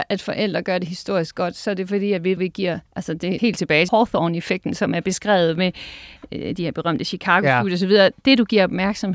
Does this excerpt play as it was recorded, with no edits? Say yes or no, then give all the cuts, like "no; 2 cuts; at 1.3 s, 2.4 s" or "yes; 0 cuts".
no; 4 cuts; at 2.4 s, 2.9 s, 3.4 s, 3.9 s